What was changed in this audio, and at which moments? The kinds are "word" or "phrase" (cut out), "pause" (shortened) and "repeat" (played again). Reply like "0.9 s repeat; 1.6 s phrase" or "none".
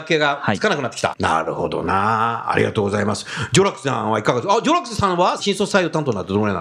1.1 s phrase

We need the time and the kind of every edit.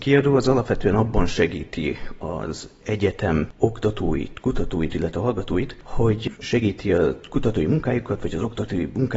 none

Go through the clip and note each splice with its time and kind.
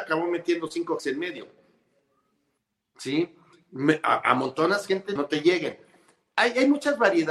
1.0 s word; 5.2 s phrase

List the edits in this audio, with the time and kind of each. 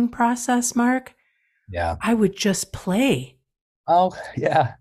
none

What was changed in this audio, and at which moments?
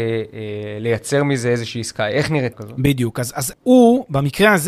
2.5 s word; 3.5 s word

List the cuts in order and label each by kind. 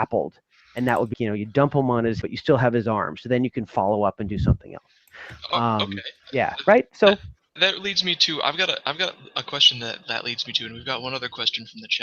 1.1 s word; 2.2 s word; 6.2 s pause; 7.6 s word; 10.0 s word

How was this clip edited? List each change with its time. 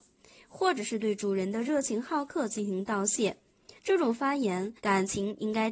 3.8 s pause; 4.8 s pause

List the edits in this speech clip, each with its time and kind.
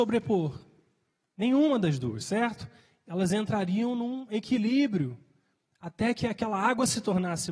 none

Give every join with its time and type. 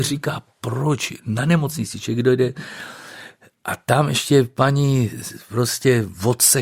none

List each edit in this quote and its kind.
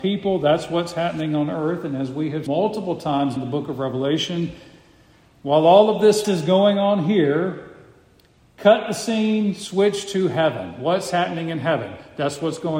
2.5 s word; 3.4 s word; 6.2 s word

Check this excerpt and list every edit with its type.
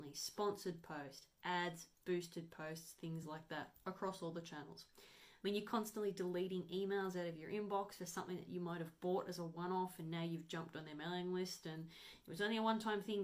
none

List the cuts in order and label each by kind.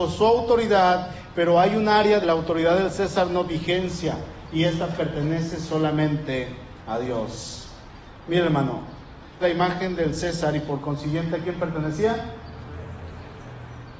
2.2 s phrase; 3.5 s word; 9.4 s phrase

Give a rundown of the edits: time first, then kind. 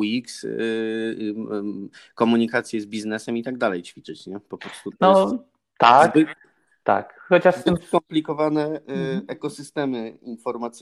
none

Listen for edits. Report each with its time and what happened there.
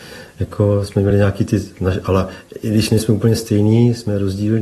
none

